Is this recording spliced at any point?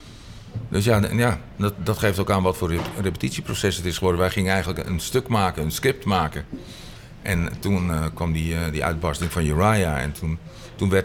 no; 0 cuts

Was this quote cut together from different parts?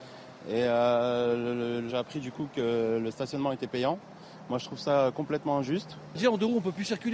yes; 1 cut; at 1.9 s

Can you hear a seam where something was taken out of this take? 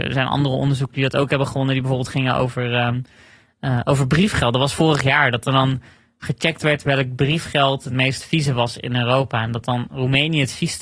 no; 0 cuts

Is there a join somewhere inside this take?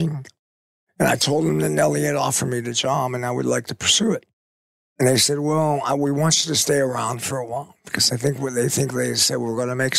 no; 0 cuts

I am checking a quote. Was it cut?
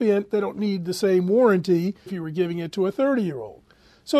yes; 1 cut; at 2.1 s

